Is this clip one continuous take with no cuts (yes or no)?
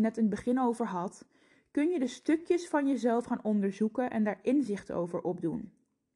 yes